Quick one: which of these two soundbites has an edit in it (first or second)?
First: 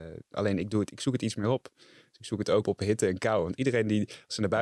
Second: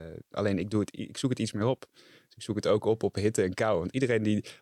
first